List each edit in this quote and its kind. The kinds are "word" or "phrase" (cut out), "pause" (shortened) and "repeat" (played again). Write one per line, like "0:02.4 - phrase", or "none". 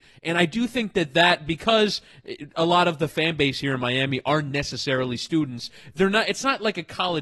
none